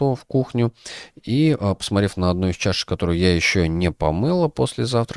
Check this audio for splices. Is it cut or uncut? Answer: uncut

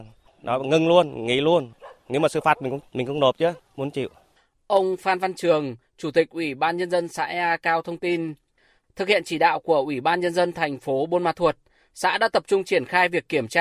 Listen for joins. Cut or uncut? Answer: uncut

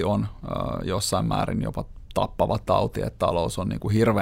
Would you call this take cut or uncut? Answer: uncut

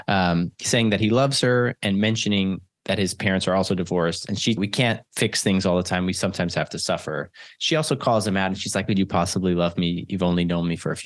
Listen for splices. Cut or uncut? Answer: cut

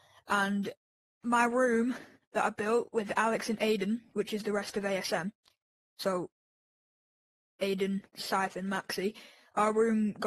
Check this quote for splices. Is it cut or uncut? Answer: uncut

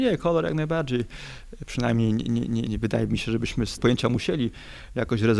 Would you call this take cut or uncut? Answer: cut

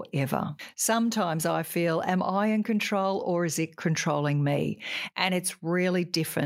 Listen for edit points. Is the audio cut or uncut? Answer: uncut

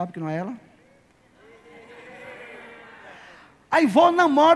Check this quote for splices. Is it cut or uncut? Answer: uncut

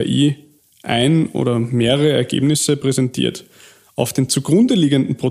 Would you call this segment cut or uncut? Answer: uncut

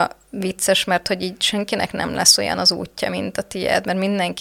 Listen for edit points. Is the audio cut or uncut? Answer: uncut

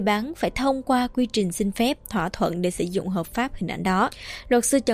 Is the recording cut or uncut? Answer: uncut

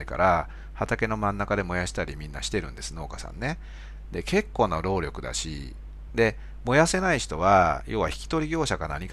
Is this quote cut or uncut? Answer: uncut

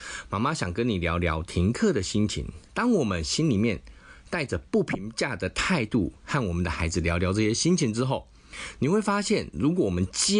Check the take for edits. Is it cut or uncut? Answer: cut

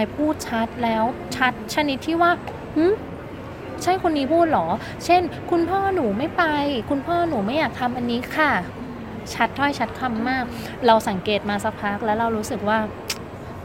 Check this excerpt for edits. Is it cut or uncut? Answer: cut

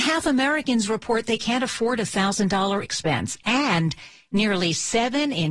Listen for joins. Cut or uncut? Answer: cut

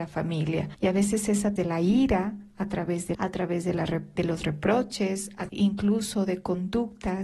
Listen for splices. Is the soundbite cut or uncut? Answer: cut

